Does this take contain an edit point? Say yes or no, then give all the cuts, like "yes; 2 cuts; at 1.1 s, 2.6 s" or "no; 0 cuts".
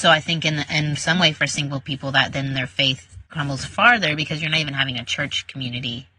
yes; 1 cut; at 3.3 s